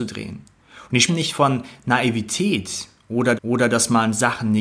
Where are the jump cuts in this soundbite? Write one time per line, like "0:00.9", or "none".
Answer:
0:01.1
0:03.3